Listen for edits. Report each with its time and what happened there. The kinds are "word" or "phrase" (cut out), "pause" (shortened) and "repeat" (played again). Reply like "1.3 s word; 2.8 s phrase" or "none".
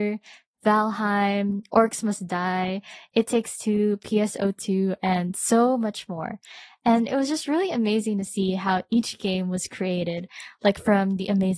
none